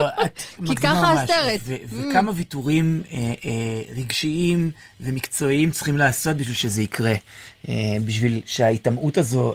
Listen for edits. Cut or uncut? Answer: uncut